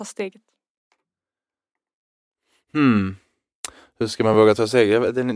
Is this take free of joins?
yes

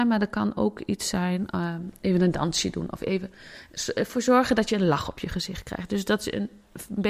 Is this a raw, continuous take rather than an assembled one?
yes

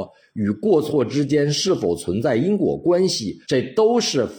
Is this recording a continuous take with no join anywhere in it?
no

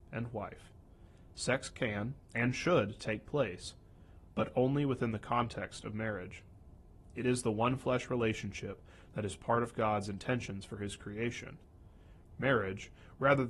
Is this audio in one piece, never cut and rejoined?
yes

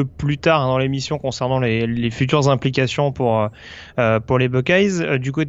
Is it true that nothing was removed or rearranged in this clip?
yes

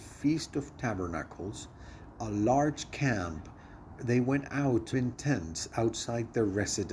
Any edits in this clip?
yes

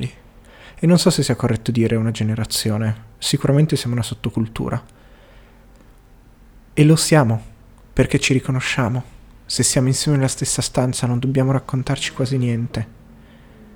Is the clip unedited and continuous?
yes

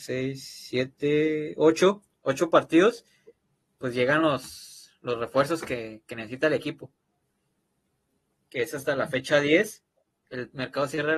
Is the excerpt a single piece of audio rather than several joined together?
yes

